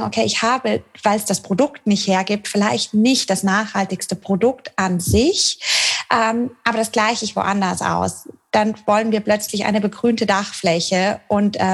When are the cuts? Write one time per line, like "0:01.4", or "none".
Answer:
none